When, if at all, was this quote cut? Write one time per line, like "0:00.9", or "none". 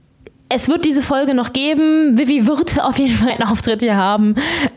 0:03.3